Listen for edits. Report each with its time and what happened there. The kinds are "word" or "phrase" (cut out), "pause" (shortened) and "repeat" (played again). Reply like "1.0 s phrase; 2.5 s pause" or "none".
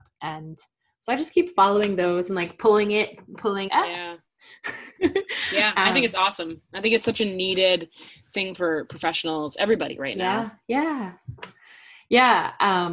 3.7 s phrase